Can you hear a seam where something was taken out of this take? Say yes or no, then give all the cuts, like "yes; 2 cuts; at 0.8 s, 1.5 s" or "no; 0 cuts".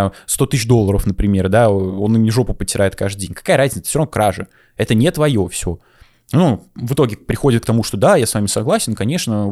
no; 0 cuts